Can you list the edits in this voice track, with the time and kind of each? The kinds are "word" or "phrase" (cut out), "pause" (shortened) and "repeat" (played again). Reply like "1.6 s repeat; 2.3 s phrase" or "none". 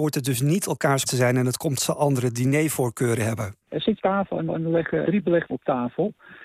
1.1 s word; 1.8 s phrase; 3.6 s pause; 4.0 s phrase; 4.5 s repeat; 5.0 s word; 5.5 s word